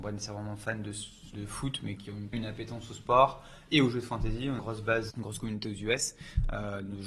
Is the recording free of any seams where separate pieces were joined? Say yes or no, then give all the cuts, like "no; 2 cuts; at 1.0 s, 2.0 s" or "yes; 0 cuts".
no; 5 cuts; at 1.3 s, 2.0 s, 2.3 s, 4.6 s, 5.1 s